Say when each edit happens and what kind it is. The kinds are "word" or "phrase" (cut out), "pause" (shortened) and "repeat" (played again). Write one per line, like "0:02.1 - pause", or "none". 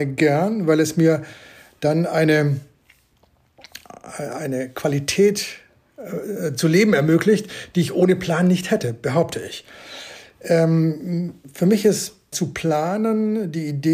0:12.3 - word